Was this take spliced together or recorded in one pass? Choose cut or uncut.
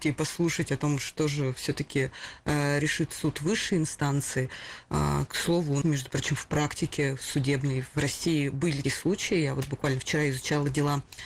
cut